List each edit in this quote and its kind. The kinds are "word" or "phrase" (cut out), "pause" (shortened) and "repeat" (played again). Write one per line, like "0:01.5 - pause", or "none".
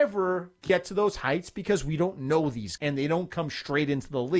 0:02.8 - word